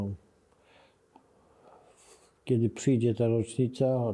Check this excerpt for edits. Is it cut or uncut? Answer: uncut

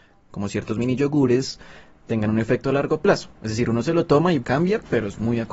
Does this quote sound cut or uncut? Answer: cut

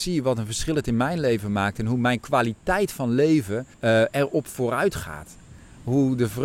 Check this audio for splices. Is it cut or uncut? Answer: cut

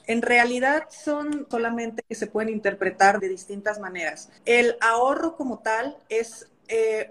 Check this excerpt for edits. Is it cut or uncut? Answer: cut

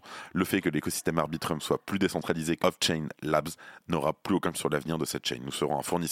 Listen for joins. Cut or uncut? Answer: cut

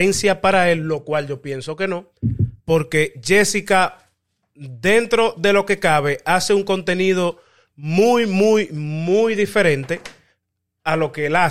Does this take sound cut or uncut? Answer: cut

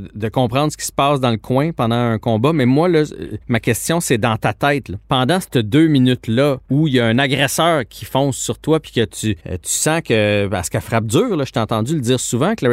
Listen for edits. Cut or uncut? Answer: cut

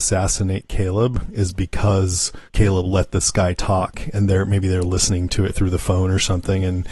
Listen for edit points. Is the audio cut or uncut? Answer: cut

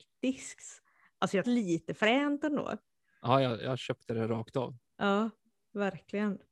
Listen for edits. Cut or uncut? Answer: cut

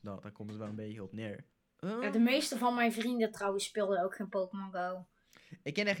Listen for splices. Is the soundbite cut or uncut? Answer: cut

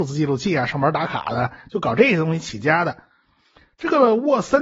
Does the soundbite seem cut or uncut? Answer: uncut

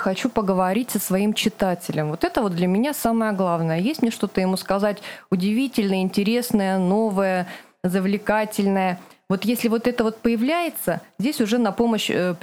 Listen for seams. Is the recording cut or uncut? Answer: uncut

